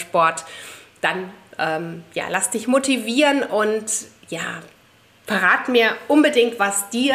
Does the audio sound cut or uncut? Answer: uncut